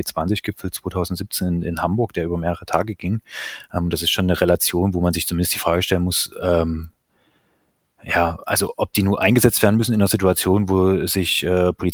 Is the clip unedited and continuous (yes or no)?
yes